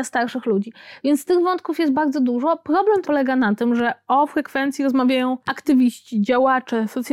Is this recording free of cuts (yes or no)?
no